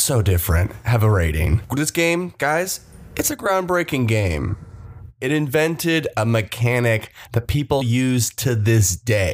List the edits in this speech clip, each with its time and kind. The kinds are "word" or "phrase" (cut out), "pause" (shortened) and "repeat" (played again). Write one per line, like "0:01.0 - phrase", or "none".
0:07.8 - word